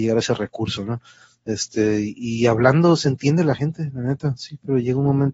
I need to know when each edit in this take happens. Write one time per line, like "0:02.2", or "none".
none